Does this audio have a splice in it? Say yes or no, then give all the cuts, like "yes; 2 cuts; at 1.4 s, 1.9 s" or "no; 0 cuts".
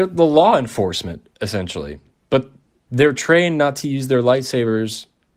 yes; 1 cut; at 2.9 s